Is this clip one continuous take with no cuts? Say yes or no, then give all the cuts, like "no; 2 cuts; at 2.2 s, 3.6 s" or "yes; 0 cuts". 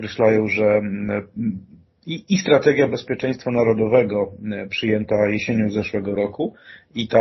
yes; 0 cuts